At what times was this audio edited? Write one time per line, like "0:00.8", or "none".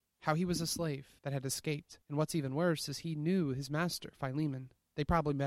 0:01.2
0:02.0

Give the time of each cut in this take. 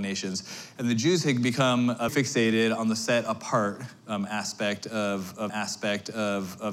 0:02.1
0:05.5

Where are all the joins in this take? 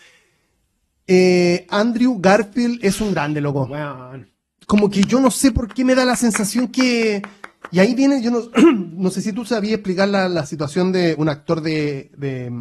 none

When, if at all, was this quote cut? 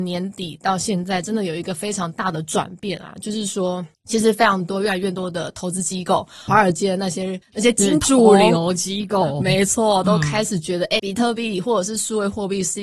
0:03.9
0:06.5
0:07.4
0:11.0

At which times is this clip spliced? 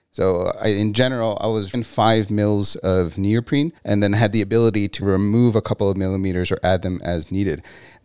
0:01.7
0:03.8
0:05.0

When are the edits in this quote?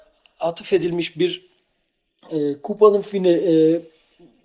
none

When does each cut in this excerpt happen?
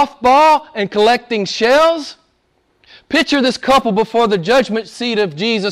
none

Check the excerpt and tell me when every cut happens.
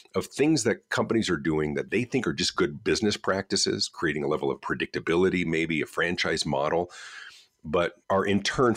none

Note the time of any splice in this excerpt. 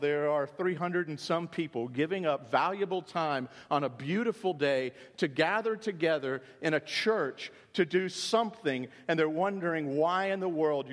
none

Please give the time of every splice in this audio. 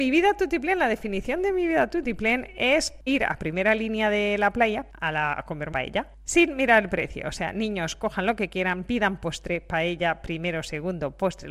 0:03.1
0:05.7

